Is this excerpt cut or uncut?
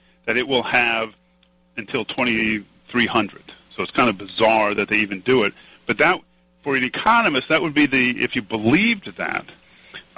uncut